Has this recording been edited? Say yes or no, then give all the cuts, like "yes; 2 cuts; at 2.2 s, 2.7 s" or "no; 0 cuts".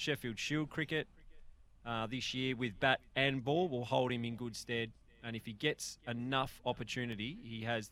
no; 0 cuts